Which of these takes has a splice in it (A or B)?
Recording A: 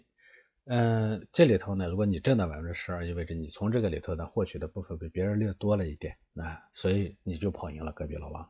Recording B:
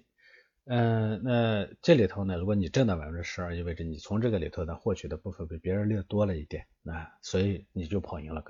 A